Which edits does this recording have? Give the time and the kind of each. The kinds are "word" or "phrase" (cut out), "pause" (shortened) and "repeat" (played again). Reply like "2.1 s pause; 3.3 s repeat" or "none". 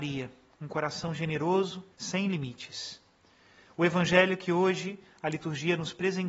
1.9 s pause